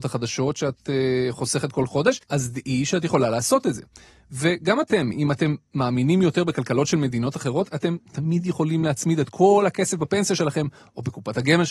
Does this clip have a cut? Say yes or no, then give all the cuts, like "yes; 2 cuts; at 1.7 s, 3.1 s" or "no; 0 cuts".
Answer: yes; 1 cut; at 2.2 s